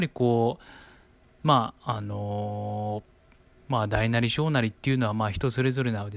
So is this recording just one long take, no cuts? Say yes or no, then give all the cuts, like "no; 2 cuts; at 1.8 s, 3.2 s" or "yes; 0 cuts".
yes; 0 cuts